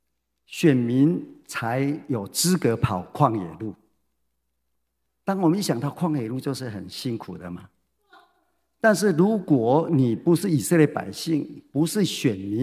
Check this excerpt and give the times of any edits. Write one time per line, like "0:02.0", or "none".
none